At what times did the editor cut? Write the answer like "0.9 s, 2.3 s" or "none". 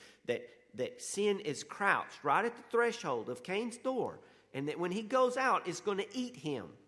none